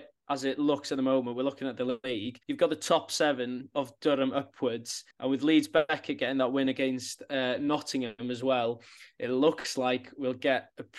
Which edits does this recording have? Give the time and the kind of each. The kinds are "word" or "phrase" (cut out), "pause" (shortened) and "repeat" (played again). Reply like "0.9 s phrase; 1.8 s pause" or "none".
2.4 s pause; 5.1 s pause

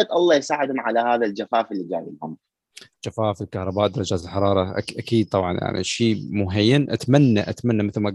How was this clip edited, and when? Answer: none

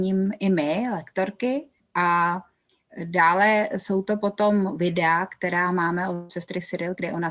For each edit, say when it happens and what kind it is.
1.8 s pause

